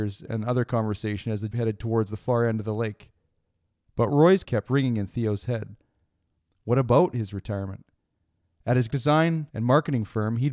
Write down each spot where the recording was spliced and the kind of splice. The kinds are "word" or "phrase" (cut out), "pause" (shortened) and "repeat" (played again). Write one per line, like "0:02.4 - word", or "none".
0:01.5 - word
0:04.4 - word
0:08.9 - word